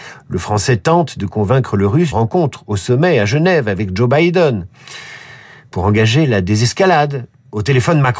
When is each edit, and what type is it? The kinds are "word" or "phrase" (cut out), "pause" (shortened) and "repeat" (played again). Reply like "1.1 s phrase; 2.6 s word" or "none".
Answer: 2.1 s word